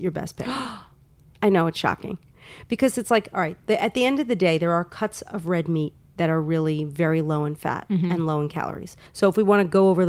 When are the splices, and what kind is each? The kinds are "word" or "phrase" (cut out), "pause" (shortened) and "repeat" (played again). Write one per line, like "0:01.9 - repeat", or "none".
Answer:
0:09.1 - pause